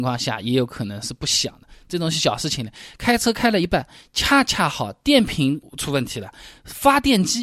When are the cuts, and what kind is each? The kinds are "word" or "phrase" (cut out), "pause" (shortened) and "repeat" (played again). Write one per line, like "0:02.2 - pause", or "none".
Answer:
none